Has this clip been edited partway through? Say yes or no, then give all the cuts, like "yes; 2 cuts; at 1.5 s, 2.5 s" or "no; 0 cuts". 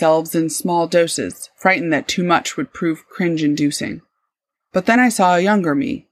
no; 0 cuts